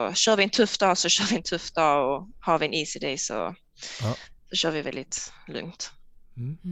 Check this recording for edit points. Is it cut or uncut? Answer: uncut